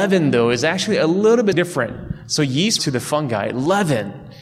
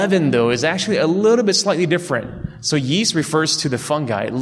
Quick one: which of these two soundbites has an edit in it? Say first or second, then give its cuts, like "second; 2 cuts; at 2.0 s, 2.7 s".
first; 2 cuts; at 1.5 s, 2.8 s